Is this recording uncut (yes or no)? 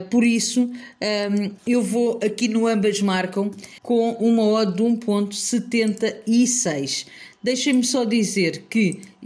no